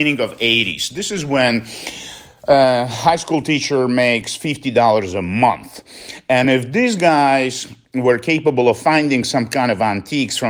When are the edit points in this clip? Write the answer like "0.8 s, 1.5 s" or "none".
none